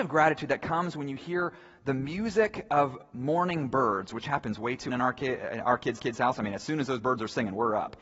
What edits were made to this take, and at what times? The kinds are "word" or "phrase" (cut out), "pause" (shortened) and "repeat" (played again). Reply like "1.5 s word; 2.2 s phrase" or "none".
4.9 s word; 6.0 s repeat